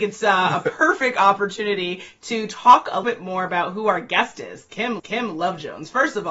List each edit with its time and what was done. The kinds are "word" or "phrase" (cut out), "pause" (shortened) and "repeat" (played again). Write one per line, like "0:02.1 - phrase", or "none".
0:03.0 - word
0:05.0 - repeat